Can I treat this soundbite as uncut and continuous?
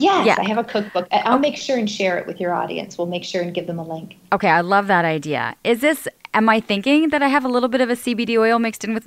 yes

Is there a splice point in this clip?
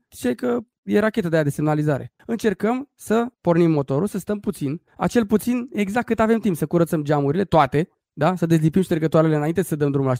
yes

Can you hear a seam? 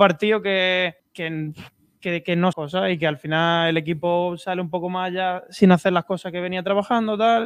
yes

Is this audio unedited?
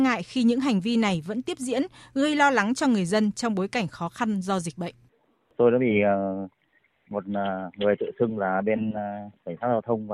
yes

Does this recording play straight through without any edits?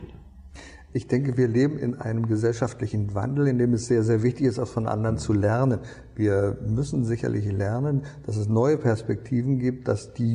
yes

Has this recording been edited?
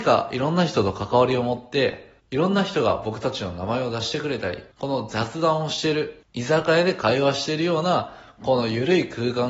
yes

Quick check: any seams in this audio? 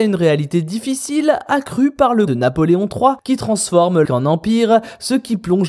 yes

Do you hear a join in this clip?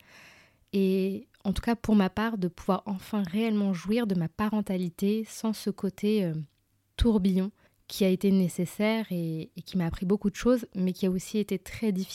no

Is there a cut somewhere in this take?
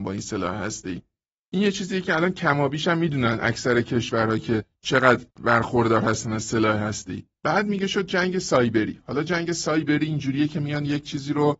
yes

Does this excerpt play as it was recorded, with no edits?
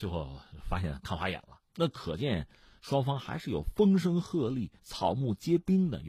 no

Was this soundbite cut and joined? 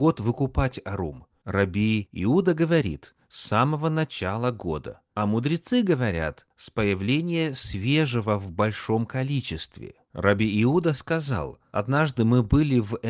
no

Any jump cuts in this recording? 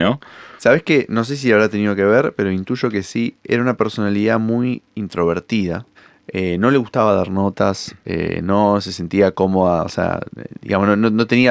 yes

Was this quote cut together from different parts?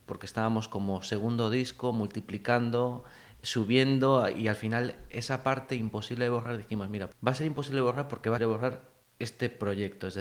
yes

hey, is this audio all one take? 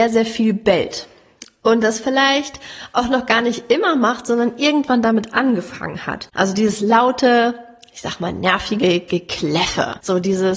yes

